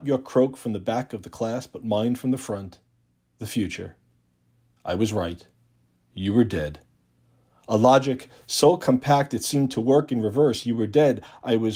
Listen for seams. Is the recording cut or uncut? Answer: uncut